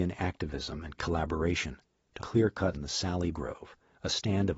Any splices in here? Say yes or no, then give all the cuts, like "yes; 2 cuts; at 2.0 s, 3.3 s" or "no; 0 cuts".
yes; 4 cuts; at 1.0 s, 2.2 s, 2.7 s, 3.3 s